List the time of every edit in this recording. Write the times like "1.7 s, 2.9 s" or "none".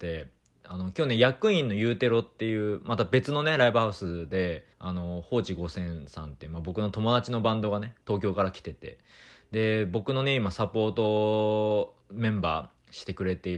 4.7 s, 8.0 s, 12.0 s